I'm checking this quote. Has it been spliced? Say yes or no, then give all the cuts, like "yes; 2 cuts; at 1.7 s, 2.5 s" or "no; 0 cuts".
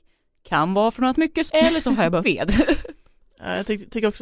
yes; 3 cuts; at 1.2 s, 1.5 s, 2.2 s